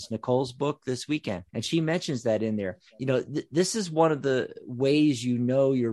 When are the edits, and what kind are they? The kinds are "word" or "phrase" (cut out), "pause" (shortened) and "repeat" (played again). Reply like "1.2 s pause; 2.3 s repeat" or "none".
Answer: 1.5 s pause; 2.9 s pause